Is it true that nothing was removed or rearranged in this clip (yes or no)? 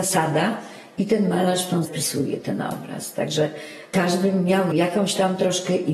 no